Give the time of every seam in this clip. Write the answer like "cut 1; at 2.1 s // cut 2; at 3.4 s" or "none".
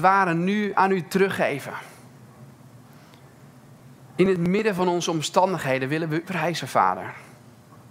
cut 1; at 6.2 s